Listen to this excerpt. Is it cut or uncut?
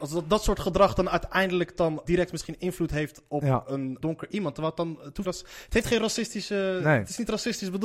cut